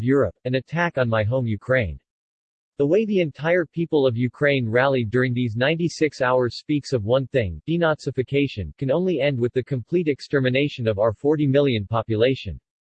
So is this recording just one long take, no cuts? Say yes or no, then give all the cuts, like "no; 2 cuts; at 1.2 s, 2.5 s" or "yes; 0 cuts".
yes; 0 cuts